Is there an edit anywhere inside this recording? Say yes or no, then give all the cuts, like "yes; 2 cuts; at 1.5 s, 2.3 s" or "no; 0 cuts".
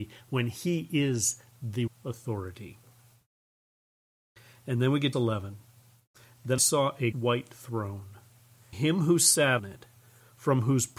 yes; 6 cuts; at 1.9 s, 5.1 s, 6.6 s, 7.1 s, 8.7 s, 9.6 s